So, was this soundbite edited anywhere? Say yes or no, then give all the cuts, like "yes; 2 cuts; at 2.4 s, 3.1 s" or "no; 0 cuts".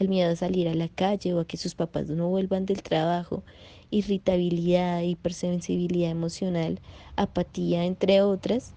no; 0 cuts